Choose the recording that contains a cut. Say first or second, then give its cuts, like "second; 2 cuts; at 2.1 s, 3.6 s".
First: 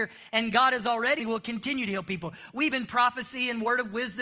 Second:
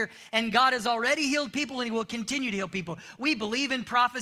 first; 2 cuts; at 1.2 s, 2.7 s